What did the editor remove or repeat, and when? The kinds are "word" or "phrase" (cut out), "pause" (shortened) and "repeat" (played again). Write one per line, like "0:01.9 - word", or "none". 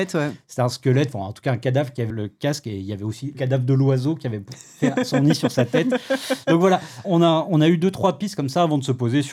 0:02.1 - word
0:03.3 - word
0:07.0 - word